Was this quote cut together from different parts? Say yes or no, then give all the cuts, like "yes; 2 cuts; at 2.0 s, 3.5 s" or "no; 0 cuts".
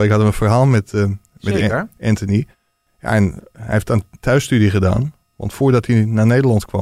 no; 0 cuts